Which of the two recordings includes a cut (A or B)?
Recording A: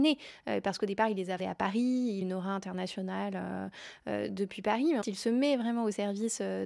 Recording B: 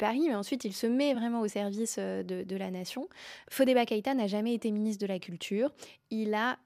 A